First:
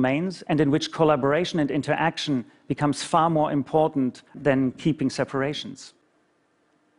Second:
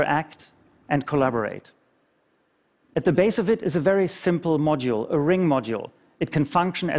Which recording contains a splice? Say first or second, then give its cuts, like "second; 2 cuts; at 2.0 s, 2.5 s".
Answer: first; 1 cut; at 4.3 s